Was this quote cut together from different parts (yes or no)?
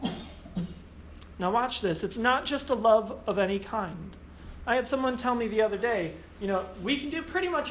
no